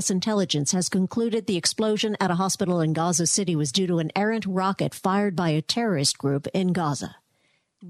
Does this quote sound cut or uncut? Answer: uncut